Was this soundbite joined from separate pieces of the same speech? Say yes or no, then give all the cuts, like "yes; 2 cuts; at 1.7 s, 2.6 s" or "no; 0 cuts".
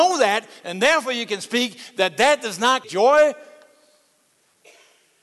yes; 1 cut; at 2.8 s